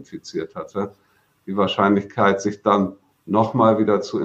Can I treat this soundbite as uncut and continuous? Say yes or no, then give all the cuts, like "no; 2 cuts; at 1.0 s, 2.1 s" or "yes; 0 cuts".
yes; 0 cuts